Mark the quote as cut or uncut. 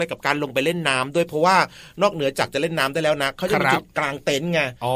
uncut